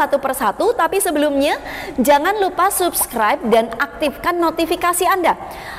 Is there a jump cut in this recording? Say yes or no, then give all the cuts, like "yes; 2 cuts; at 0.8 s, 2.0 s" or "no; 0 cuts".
no; 0 cuts